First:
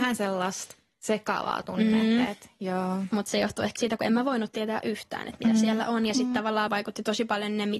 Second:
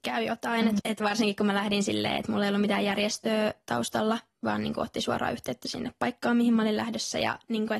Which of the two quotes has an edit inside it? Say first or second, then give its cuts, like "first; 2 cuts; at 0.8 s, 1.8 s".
first; 2 cuts; at 3.8 s, 6.7 s